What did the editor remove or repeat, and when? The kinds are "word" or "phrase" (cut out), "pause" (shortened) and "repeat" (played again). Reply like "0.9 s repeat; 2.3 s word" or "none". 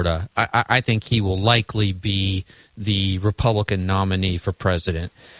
none